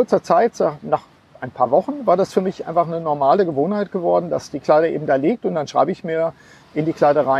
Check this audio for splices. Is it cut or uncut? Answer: uncut